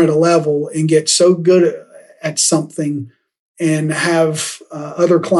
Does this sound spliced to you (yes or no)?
no